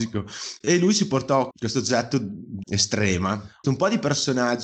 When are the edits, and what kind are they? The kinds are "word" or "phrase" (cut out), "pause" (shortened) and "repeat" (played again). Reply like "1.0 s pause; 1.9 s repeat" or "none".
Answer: 1.5 s word; 2.6 s word; 3.6 s word